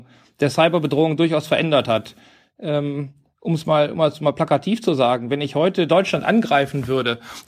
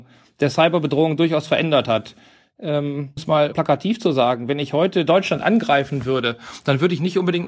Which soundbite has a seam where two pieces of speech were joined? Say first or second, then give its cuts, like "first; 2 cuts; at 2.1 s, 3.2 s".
second; 2 cuts; at 3.2 s, 3.5 s